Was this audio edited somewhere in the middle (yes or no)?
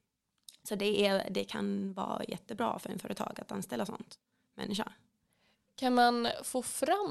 no